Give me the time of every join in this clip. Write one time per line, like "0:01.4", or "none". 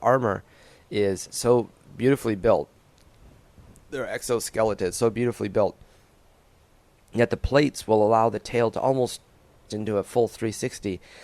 0:01.3
0:09.7